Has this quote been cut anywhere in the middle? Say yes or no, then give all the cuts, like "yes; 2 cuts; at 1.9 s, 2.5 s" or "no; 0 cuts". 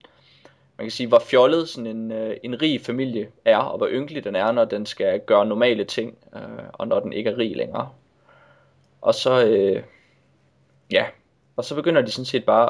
no; 0 cuts